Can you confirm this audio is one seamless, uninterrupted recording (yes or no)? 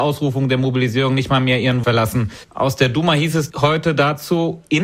no